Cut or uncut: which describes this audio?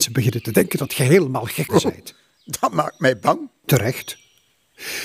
cut